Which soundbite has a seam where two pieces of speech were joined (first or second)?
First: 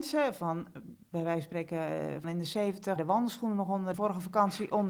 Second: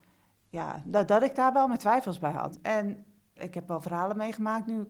first